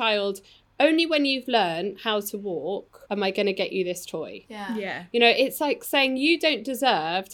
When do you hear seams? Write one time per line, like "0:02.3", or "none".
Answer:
0:03.0

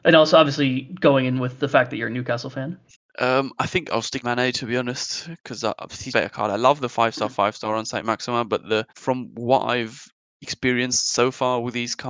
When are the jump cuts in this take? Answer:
0:02.9
0:04.2
0:06.1
0:08.9
0:10.1

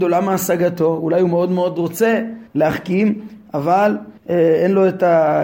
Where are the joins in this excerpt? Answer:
0:02.5
0:04.2

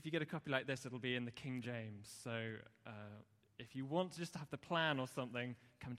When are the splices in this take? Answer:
none

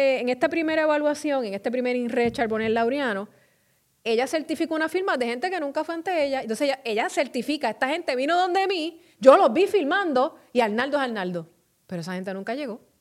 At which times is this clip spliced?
none

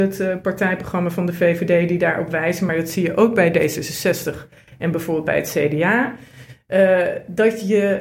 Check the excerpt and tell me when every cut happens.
none

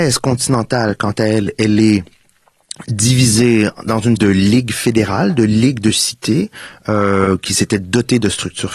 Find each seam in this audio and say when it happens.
0:04.2

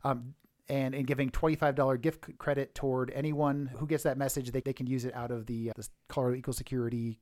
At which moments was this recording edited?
0:02.4
0:03.7
0:04.6
0:05.7

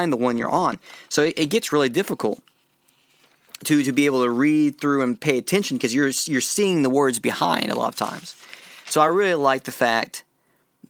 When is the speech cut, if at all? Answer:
none

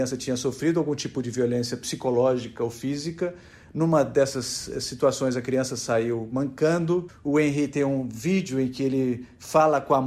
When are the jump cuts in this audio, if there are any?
none

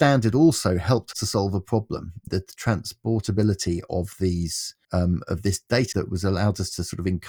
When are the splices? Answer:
0:01.1
0:02.3
0:04.8
0:05.9

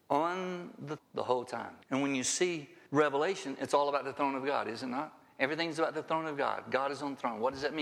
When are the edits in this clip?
0:01.0
0:01.8
0:02.9

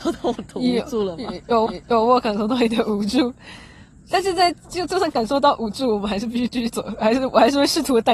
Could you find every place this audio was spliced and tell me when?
0:01.7

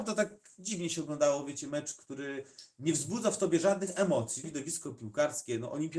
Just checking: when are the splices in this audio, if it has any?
0:04.4

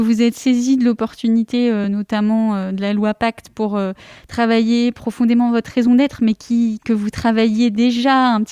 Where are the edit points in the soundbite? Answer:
none

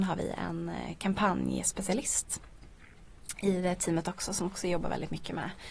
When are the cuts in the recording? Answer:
none

